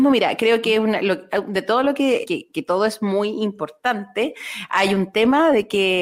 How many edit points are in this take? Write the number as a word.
one